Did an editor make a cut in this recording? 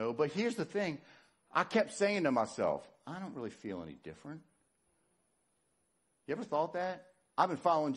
no; 0 cuts

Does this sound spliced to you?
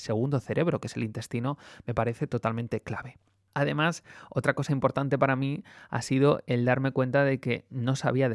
no; 0 cuts

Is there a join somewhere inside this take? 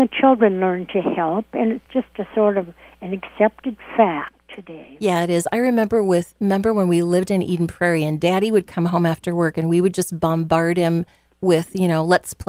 no; 0 cuts

